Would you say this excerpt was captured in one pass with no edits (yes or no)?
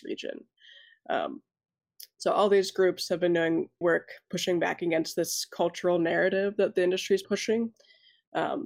no